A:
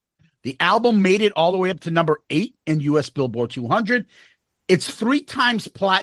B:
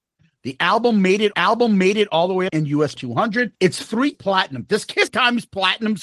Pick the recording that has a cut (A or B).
B